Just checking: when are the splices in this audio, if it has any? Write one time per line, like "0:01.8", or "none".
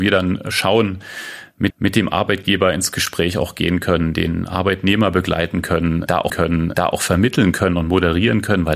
0:01.7
0:06.3